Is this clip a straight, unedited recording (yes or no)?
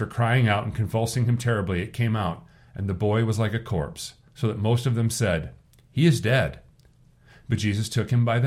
yes